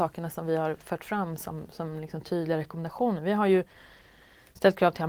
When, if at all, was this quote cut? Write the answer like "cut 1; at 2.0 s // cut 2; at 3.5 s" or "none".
none